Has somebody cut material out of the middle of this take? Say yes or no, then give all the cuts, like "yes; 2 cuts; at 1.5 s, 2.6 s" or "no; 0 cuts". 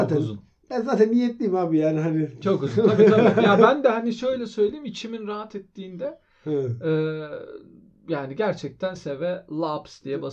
yes; 1 cut; at 9.0 s